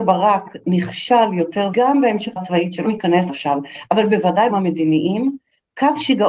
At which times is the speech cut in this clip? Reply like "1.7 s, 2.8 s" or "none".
1.7 s, 2.4 s, 2.8 s, 3.3 s, 4.5 s